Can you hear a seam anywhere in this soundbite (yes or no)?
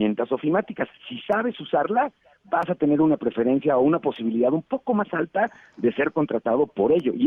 no